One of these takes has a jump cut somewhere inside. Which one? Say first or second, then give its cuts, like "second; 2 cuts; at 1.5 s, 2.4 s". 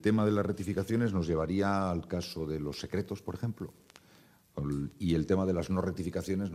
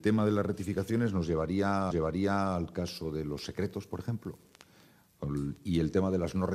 second; 1 cut; at 1.9 s